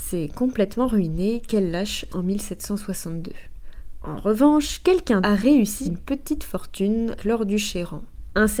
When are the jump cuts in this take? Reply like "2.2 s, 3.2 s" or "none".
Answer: 2.1 s, 5.2 s, 5.9 s, 7.2 s

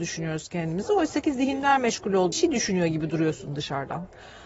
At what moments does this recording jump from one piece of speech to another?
2.3 s

